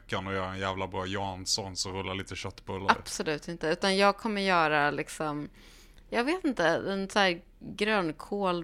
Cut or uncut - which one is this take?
uncut